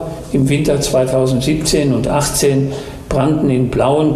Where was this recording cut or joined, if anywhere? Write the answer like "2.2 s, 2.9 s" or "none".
none

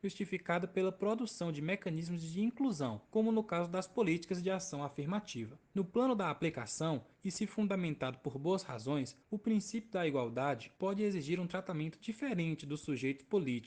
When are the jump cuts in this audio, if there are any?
3.0 s, 5.6 s, 7.1 s, 9.2 s, 10.8 s

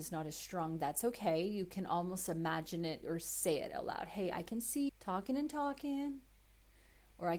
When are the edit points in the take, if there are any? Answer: 3.0 s, 4.9 s

